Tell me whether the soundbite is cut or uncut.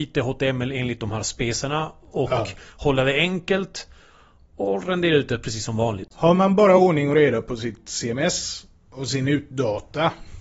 uncut